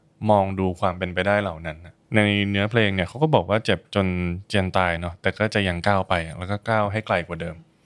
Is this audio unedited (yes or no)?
no